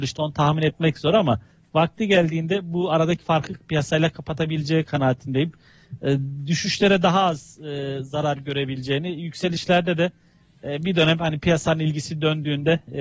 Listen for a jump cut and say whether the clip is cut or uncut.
uncut